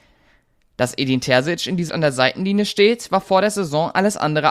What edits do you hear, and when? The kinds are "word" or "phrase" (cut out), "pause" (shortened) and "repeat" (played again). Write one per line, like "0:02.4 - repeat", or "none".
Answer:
0:01.9 - word